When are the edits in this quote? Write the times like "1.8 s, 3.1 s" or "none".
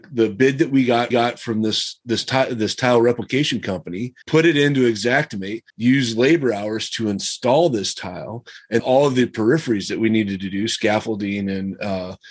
1.1 s, 4.2 s, 5.7 s, 8.8 s